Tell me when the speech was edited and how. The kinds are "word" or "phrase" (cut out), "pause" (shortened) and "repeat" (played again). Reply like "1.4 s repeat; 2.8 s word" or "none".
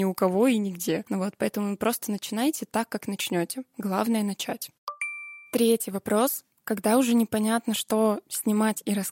none